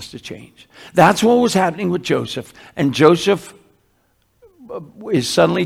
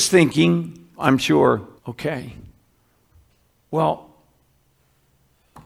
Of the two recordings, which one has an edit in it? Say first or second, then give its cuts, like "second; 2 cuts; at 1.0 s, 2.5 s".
second; 2 cuts; at 0.9 s, 1.8 s